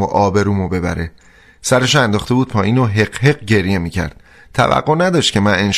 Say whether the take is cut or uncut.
uncut